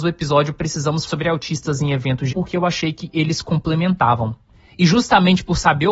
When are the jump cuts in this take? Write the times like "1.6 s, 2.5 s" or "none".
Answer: 1.1 s, 2.3 s